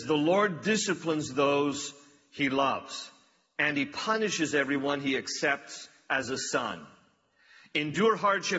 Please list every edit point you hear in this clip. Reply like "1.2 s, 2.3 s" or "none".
none